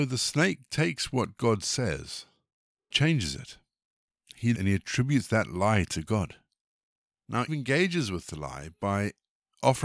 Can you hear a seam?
yes; 3 cuts; at 2.9 s, 4.5 s, 7.5 s

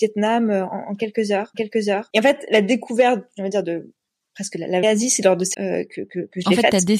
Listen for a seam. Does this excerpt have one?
yes; 3 cuts; at 1.5 s, 4.8 s, 5.5 s

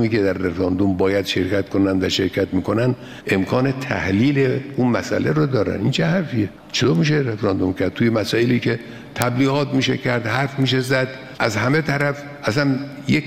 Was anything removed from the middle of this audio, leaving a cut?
no; 0 cuts

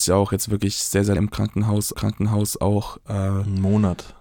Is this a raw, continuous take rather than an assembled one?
no; 2 cuts; at 1.2 s, 1.9 s

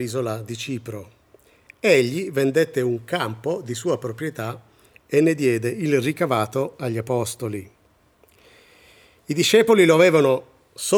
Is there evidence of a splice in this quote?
no; 0 cuts

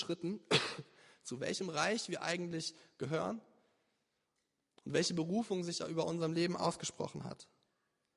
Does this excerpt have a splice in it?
no; 0 cuts

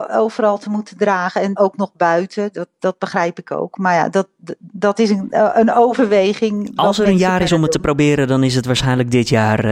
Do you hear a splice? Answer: yes; 1 cut; at 1.6 s

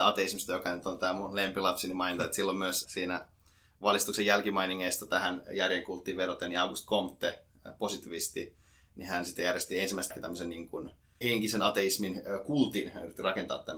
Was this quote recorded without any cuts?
no; 3 cuts; at 2.8 s, 10.1 s, 11.2 s

